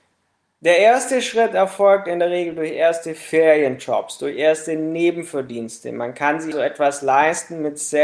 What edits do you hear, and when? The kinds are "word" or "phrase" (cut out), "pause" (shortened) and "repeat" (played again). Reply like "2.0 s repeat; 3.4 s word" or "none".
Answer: 6.5 s word